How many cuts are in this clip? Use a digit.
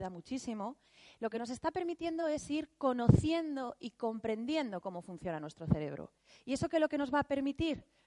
0